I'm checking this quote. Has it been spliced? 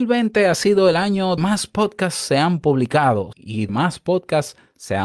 yes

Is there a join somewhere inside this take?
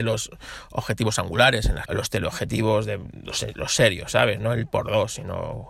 yes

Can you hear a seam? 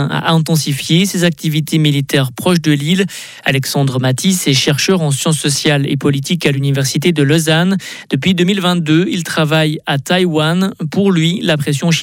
no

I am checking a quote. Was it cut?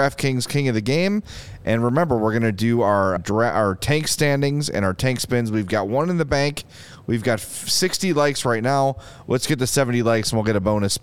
yes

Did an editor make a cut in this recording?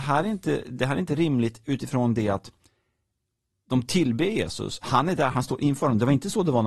no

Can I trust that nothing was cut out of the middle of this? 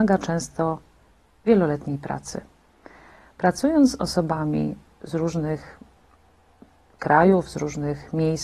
yes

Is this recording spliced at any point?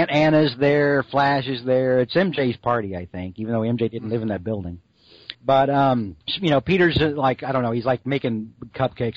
yes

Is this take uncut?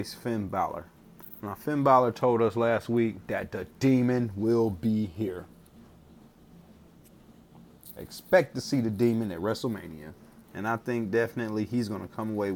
no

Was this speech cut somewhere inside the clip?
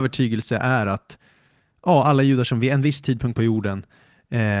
no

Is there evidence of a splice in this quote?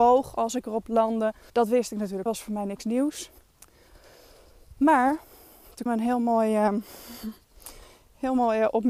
yes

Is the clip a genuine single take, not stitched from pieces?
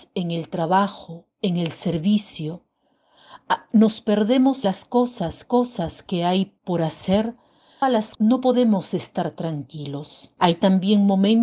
no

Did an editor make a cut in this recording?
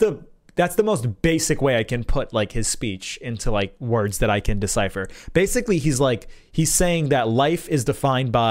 no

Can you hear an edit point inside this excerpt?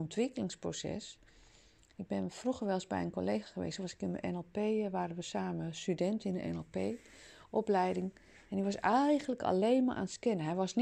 no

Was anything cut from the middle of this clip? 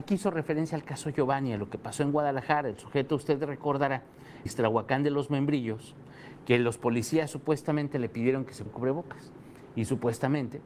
yes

